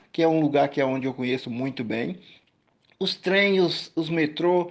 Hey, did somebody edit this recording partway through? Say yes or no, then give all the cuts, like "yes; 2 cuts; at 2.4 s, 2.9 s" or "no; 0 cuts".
no; 0 cuts